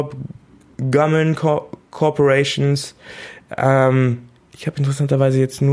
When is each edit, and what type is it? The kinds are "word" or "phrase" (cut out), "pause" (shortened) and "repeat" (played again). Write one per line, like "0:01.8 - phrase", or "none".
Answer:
0:04.4 - pause